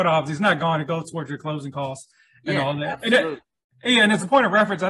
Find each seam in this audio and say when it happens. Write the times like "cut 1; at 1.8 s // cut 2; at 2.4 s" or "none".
none